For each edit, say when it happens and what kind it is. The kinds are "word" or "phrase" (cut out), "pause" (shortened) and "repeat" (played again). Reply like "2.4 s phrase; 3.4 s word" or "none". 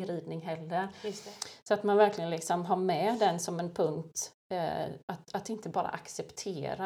none